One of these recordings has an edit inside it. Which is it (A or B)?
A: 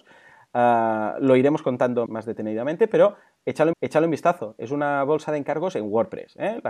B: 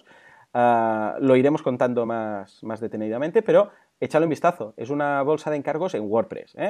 A